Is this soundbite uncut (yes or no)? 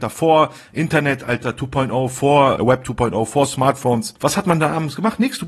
no